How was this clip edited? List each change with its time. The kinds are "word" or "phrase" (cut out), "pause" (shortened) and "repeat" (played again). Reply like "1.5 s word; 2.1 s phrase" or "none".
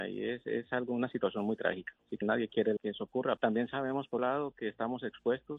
2.2 s word; 2.8 s word; 3.4 s word; 4.2 s word